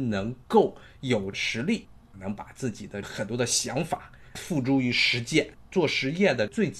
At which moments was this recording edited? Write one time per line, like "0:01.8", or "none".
0:05.7

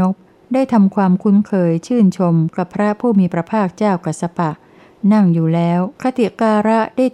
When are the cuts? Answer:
0:05.9

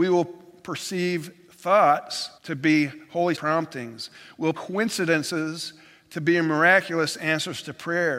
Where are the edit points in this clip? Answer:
0:02.4
0:03.4
0:04.5

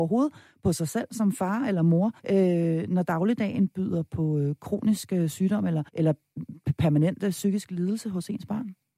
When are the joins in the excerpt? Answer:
0:02.2
0:05.9

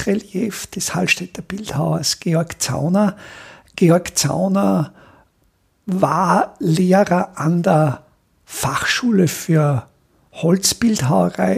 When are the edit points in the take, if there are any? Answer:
none

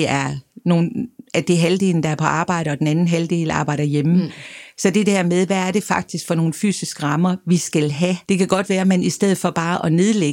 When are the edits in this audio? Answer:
0:08.2

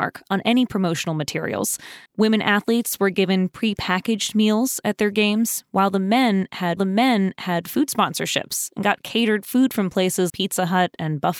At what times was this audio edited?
0:02.1
0:06.8
0:10.3

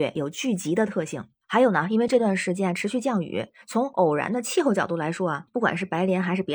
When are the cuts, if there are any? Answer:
none

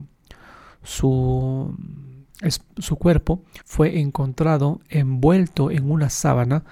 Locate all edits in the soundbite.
0:03.6

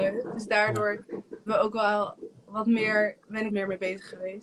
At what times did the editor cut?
0:01.5
0:03.5

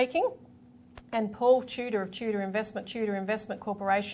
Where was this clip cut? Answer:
0:02.9

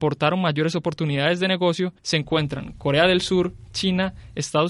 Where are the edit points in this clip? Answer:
0:02.0

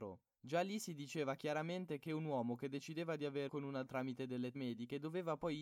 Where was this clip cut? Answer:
0:03.5
0:03.9
0:04.5

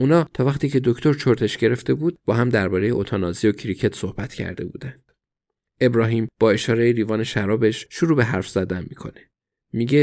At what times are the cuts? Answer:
none

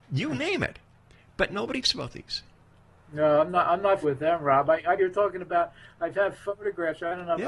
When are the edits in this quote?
0:01.8
0:04.0
0:05.0

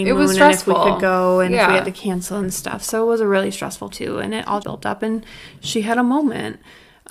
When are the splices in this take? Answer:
0:03.9
0:04.6

